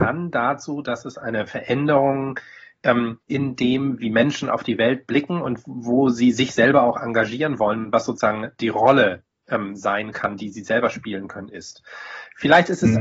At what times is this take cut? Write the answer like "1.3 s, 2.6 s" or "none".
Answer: 3.2 s